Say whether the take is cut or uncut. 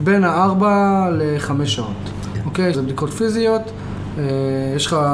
cut